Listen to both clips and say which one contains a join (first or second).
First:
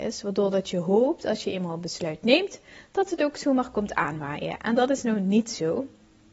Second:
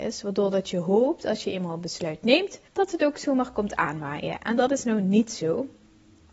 second